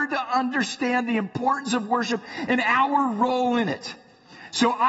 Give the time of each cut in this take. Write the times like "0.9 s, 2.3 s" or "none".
none